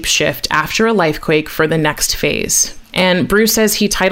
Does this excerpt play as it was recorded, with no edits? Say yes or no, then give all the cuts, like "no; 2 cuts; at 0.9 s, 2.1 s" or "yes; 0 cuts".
yes; 0 cuts